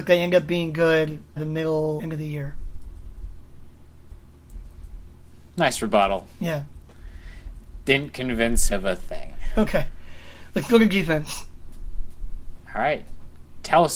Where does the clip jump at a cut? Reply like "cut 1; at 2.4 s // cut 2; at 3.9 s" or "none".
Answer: cut 1; at 1.4 s // cut 2; at 2.0 s // cut 3; at 5.5 s // cut 4; at 8.7 s